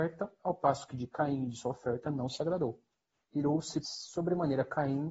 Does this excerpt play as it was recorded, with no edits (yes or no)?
no